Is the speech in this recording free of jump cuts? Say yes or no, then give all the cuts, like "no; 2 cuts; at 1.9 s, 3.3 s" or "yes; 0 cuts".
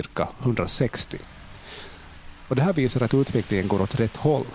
yes; 0 cuts